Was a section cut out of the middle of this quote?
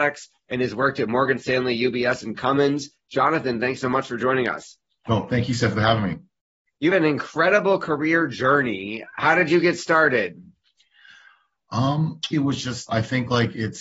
yes; 3 cuts; at 6.9 s, 12.3 s, 12.9 s

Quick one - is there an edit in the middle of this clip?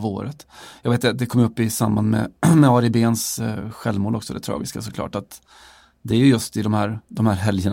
no; 0 cuts

